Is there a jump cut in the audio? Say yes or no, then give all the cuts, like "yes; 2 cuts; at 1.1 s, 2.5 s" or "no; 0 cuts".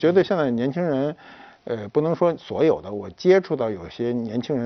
no; 0 cuts